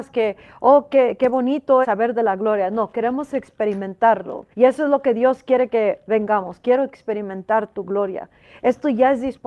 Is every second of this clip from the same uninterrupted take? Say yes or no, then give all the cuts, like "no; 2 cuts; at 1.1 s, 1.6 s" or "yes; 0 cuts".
no; 2 cuts; at 1.8 s, 4.5 s